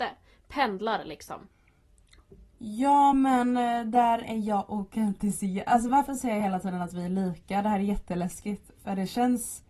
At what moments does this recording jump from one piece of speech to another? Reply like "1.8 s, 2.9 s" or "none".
none